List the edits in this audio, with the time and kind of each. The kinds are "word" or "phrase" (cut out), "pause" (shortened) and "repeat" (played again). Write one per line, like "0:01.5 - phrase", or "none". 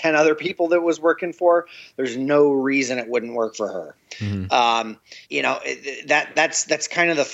0:05.2 - pause